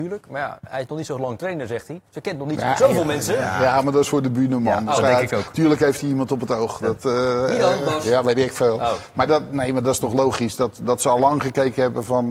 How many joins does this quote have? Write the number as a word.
one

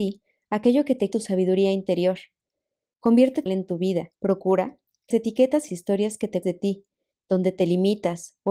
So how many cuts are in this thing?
six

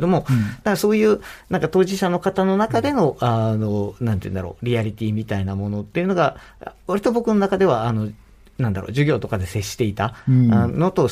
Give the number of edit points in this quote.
zero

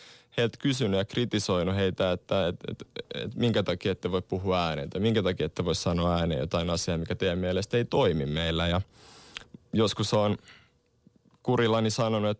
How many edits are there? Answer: zero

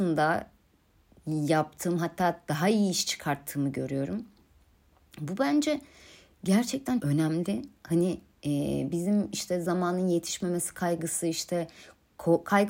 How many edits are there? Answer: one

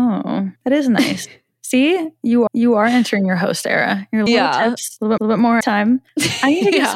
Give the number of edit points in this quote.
four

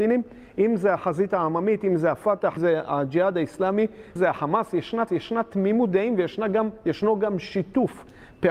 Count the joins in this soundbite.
three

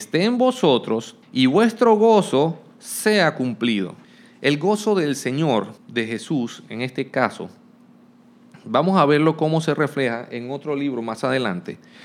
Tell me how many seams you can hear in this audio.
three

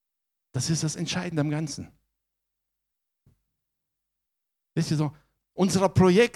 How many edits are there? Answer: zero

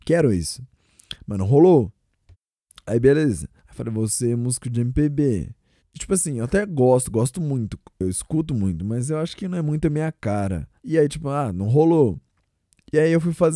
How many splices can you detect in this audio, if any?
four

